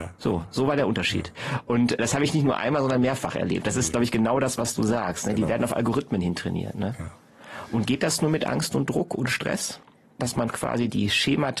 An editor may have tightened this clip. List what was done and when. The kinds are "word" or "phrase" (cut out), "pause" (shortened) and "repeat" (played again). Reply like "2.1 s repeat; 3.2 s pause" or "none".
none